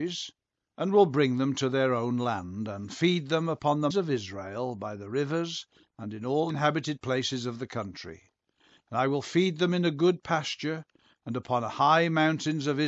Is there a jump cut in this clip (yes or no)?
yes